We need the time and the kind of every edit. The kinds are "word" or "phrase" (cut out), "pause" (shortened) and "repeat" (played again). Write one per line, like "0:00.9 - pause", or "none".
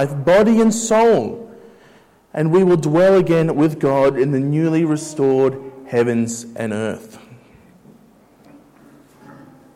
none